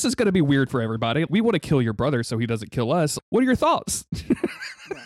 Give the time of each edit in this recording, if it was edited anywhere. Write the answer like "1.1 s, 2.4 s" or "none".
1.3 s, 3.2 s